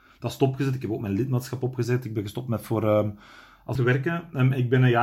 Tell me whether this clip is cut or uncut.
cut